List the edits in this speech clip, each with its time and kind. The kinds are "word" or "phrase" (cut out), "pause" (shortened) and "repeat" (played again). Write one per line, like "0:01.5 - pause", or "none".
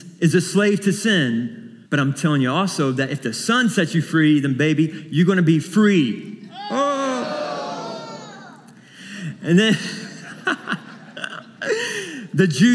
0:01.9 - pause